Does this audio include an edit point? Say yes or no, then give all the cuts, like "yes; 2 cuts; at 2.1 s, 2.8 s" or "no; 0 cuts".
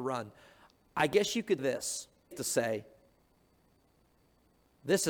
yes; 2 cuts; at 1.6 s, 2.3 s